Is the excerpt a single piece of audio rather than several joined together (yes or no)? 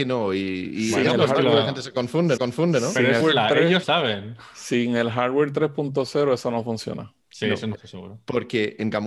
no